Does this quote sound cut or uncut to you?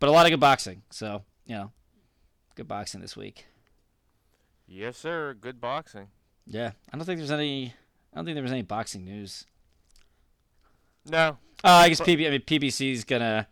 uncut